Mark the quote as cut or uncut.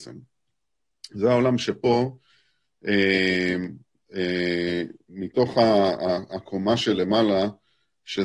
uncut